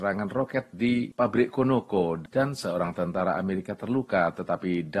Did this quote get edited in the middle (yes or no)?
no